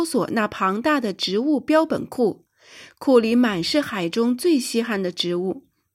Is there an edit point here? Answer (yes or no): no